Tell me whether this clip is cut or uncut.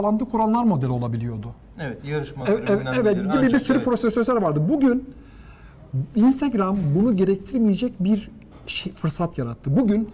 uncut